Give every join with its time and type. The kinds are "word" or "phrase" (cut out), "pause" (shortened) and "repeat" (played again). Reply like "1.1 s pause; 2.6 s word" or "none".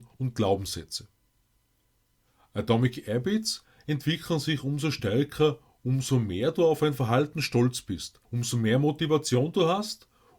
8.2 s pause